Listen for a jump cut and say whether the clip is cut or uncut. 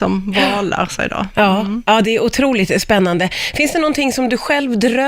cut